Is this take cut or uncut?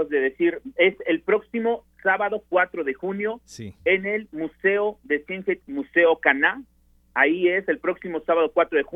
cut